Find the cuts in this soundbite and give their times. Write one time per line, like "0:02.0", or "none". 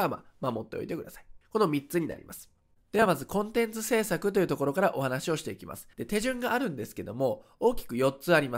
0:01.4
0:05.9